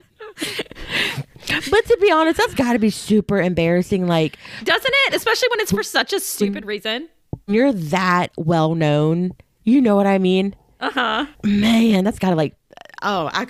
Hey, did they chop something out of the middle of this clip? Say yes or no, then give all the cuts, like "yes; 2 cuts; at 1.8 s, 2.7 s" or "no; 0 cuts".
yes; 1 cut; at 11.3 s